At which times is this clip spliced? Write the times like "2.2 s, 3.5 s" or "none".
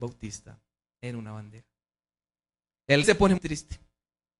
3.0 s, 3.4 s